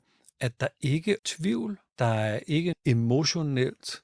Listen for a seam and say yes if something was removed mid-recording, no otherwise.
yes